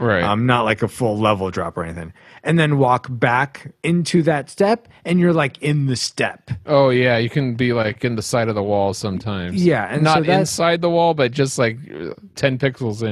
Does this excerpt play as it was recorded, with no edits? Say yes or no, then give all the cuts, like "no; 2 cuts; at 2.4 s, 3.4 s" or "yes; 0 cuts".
yes; 0 cuts